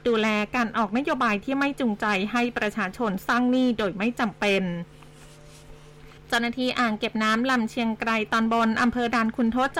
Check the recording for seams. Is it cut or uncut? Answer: cut